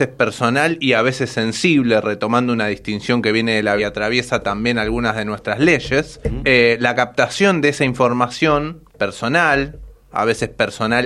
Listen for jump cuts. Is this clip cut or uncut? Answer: cut